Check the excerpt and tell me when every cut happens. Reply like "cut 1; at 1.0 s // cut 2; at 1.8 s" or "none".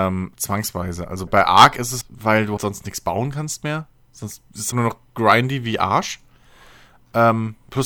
cut 1; at 1.3 s // cut 2; at 2.0 s // cut 3; at 2.6 s // cut 4; at 4.7 s